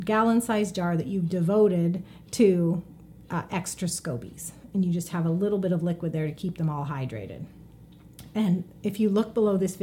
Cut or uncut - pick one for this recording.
uncut